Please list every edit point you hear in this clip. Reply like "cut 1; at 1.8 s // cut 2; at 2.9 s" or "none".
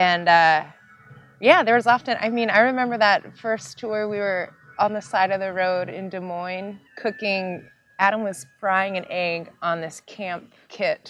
cut 1; at 6.9 s

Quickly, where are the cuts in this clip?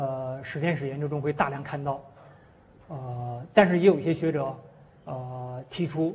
none

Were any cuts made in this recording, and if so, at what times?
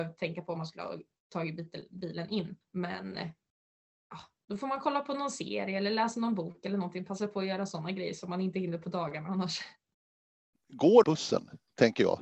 cut 1; at 2.6 s // cut 2; at 11.0 s

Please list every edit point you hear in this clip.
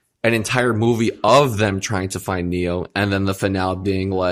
none

